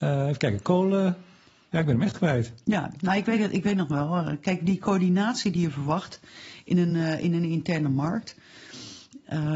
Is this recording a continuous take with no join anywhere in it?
yes; 0 cuts

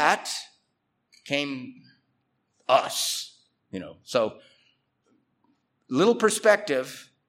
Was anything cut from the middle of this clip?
no; 0 cuts

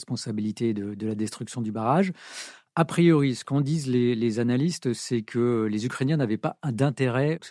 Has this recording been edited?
no; 0 cuts

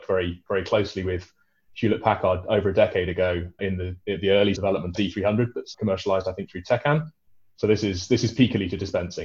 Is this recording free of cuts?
no; 4 cuts; at 3.6 s, 4.6 s, 4.9 s, 5.7 s

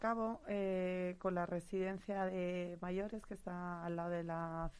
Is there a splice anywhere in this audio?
no; 0 cuts

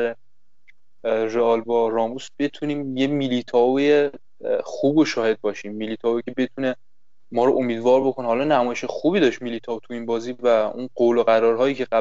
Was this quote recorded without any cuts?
yes; 0 cuts

